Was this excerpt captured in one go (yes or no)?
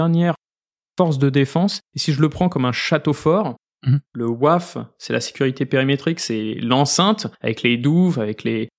no